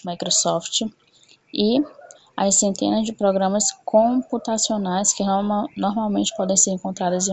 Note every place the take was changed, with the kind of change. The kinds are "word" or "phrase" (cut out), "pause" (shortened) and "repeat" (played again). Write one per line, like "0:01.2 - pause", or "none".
0:02.1 - pause